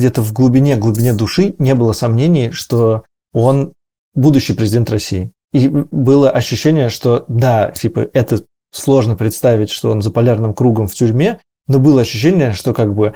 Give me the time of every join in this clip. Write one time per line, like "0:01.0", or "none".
none